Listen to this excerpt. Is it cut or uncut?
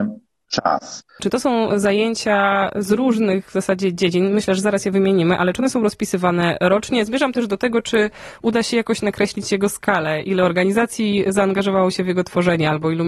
cut